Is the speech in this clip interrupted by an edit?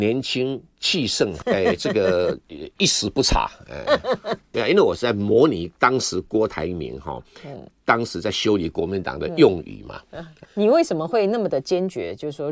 yes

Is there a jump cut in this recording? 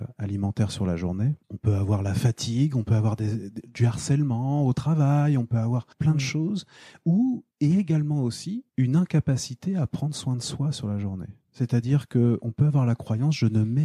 yes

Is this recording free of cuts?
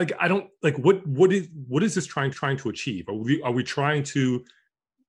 no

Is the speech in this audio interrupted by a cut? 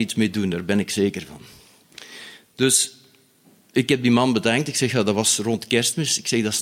no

